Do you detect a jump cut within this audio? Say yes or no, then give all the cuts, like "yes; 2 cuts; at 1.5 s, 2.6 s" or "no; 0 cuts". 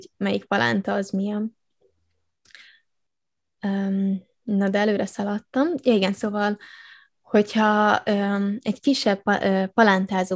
no; 0 cuts